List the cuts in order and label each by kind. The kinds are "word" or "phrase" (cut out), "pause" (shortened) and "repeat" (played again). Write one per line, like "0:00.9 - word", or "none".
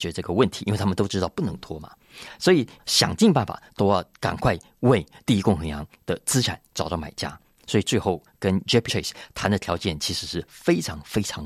0:08.9 - word